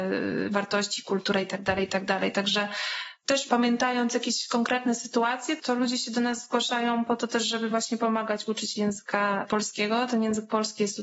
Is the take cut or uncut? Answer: uncut